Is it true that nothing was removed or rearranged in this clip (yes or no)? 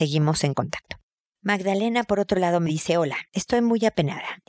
yes